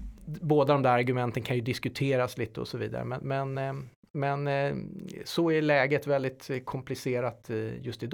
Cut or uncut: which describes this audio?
uncut